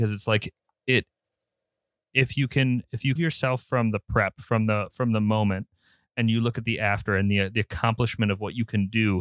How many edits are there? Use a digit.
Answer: 1